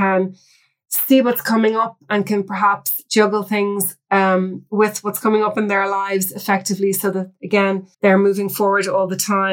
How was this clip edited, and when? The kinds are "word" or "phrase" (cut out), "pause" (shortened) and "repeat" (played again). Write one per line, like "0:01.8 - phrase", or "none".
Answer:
0:07.9 - pause